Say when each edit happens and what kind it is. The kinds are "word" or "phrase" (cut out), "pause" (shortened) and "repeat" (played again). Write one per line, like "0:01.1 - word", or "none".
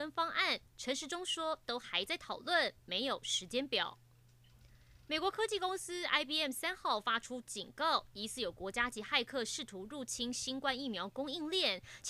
none